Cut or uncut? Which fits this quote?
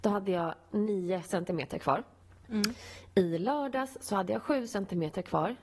cut